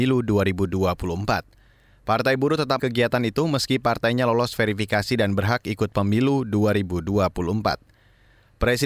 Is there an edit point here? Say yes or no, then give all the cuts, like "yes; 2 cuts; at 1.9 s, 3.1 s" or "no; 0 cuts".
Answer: yes; 1 cut; at 2.8 s